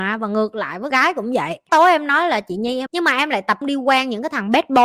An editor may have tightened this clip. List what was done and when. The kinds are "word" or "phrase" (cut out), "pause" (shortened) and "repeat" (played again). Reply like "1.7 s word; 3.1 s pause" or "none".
0.9 s word; 1.7 s phrase; 2.9 s phrase; 3.6 s word